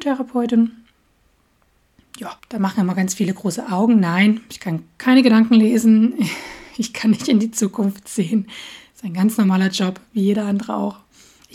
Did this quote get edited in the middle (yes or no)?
yes